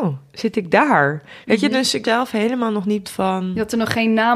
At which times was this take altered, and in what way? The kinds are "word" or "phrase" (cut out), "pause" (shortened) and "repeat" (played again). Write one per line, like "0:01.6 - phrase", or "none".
0:02.0 - word
0:03.0 - word

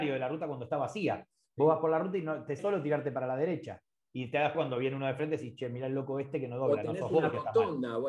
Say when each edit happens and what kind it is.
0:02.6 - word
0:04.5 - word

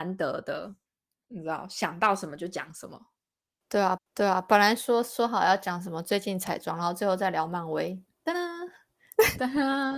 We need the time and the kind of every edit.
0:04.0 - repeat

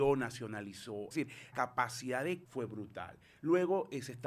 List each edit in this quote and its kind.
0:01.1 - word
0:01.5 - word
0:02.4 - word

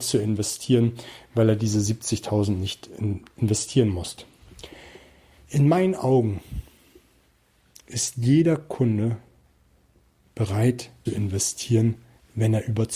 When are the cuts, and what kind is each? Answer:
0:11.1 - word

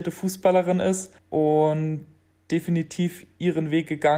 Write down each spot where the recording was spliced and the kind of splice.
0:01.2 - pause

